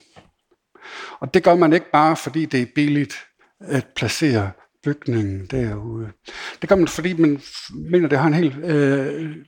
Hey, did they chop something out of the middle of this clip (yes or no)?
no